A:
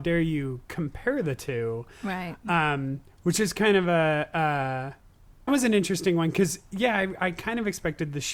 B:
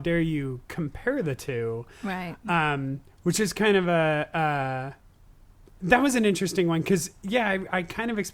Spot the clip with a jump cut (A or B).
A